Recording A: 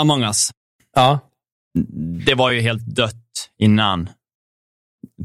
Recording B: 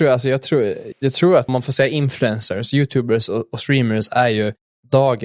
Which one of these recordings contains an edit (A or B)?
B